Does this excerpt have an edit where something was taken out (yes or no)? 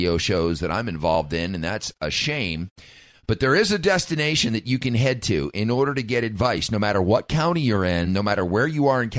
no